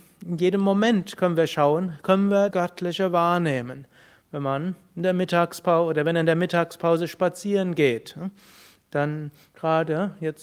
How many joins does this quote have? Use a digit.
1